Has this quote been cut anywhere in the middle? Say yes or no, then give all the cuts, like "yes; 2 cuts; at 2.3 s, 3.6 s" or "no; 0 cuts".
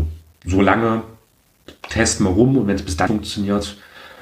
yes; 1 cut; at 3.1 s